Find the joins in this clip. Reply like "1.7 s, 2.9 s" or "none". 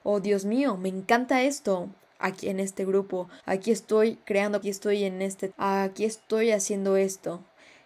2.4 s, 3.4 s, 4.6 s, 5.5 s

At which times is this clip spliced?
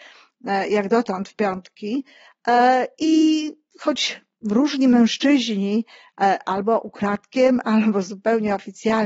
4.4 s

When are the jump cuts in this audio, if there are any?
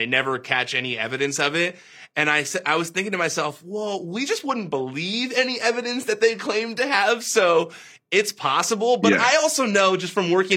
none

